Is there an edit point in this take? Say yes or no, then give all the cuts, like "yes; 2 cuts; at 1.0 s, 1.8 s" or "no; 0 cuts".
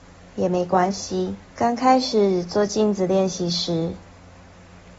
yes; 1 cut; at 1.5 s